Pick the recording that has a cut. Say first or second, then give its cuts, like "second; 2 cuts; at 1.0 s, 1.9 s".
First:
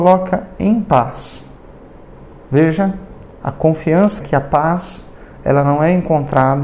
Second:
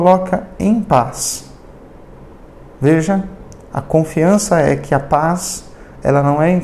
first; 2 cuts; at 2.3 s, 4.2 s